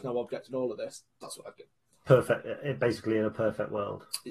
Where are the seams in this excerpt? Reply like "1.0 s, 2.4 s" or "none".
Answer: none